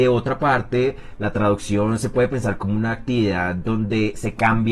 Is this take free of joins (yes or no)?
yes